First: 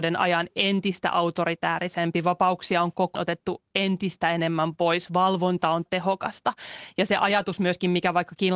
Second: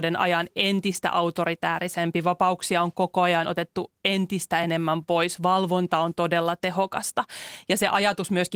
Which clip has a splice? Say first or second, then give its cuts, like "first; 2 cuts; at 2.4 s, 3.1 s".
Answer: first; 2 cuts; at 3.1 s, 5.9 s